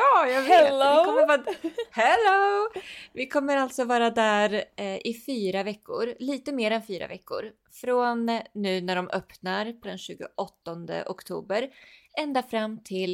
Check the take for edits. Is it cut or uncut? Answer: cut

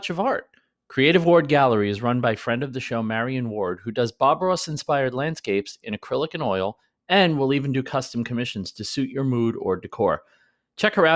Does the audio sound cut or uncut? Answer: uncut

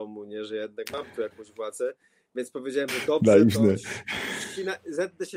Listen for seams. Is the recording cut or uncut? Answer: uncut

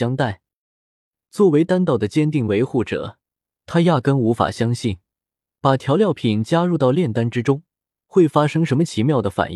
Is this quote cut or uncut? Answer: uncut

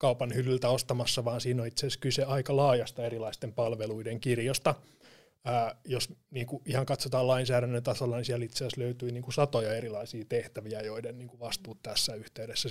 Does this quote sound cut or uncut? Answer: uncut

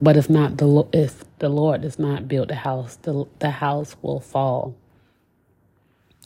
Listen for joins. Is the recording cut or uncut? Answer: uncut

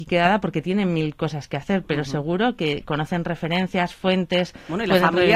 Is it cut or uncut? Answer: uncut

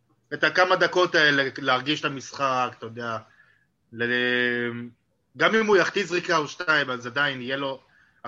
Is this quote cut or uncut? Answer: uncut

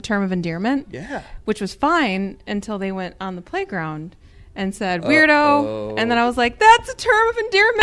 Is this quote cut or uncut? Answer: uncut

